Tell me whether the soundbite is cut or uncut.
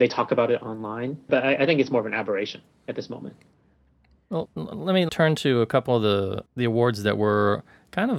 cut